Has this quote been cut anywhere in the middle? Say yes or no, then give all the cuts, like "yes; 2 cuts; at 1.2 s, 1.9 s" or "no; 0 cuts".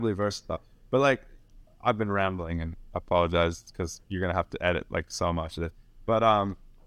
yes; 1 cut; at 4.0 s